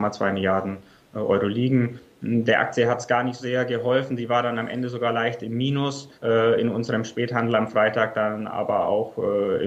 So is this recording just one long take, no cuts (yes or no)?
no